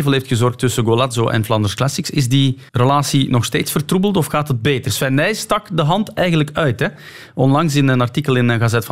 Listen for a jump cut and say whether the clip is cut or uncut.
cut